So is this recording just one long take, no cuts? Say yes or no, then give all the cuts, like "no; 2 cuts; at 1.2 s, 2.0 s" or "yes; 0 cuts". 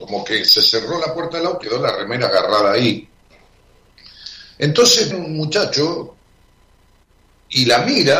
no; 2 cuts; at 1.6 s, 5.1 s